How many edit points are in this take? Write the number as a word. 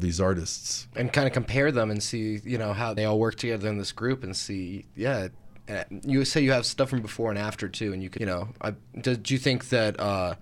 two